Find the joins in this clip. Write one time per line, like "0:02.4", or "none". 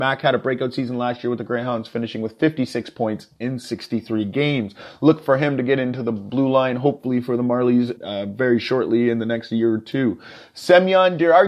0:08.0